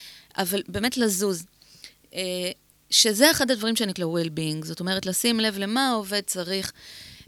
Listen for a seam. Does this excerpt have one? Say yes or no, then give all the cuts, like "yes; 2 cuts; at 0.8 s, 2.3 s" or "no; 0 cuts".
yes; 1 cut; at 3.9 s